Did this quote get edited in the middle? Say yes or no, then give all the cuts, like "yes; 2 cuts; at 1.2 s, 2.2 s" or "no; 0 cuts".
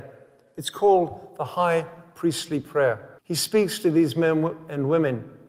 yes; 1 cut; at 3.2 s